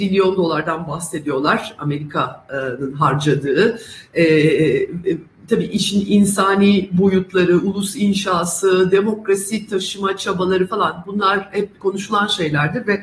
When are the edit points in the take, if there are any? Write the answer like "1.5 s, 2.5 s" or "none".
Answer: 11.8 s